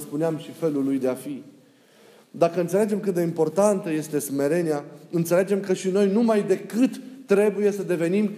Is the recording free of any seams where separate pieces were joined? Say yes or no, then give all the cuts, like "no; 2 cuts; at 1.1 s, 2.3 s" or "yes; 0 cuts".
yes; 0 cuts